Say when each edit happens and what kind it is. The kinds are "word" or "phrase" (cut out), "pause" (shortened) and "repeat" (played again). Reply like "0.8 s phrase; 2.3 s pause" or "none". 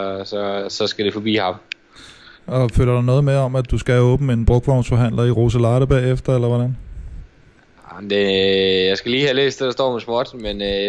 none